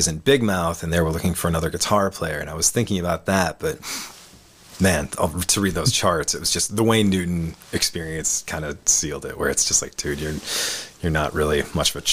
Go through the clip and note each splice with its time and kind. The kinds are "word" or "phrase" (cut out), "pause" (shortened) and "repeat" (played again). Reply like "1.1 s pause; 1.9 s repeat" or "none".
none